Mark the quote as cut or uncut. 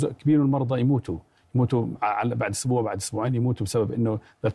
uncut